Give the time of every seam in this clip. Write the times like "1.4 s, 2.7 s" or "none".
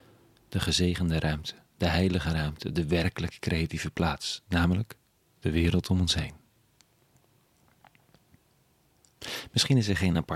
5.2 s